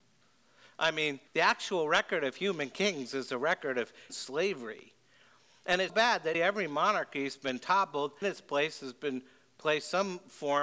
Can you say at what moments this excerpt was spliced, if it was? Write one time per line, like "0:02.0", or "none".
0:01.3
0:04.1
0:05.9
0:06.3
0:08.2

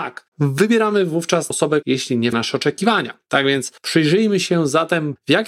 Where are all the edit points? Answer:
0:01.5
0:01.8
0:02.3
0:03.8

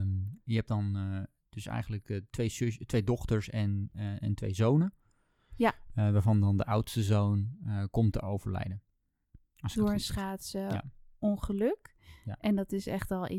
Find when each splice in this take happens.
none

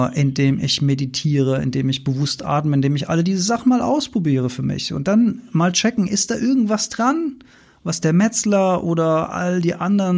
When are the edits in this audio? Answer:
none

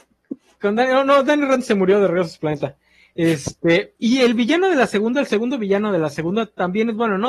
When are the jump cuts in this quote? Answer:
0:04.0

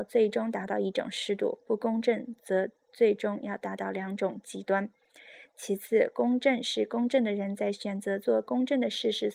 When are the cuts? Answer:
none

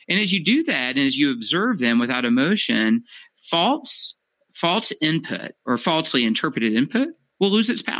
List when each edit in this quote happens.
0:05.6

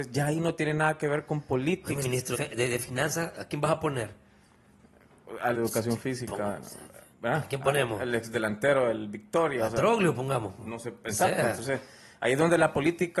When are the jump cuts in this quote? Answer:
0:02.0
0:02.3
0:05.5

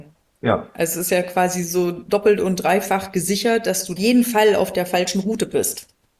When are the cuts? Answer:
0:04.0

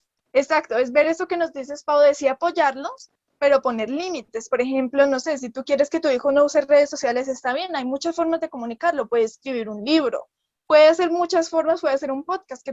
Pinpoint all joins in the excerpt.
none

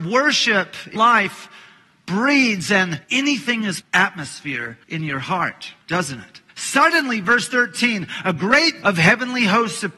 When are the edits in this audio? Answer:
0:01.0
0:03.0
0:03.8
0:04.8
0:05.8
0:06.5
0:08.8

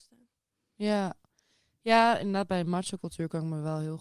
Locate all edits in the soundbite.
none

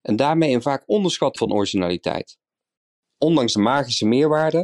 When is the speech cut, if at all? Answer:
0:01.4
0:03.5

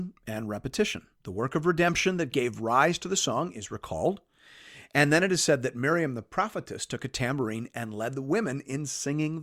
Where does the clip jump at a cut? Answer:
0:01.1

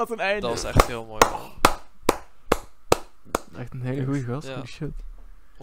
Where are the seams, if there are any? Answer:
0:03.5

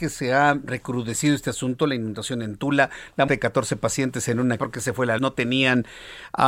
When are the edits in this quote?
0:03.3
0:04.6
0:05.2

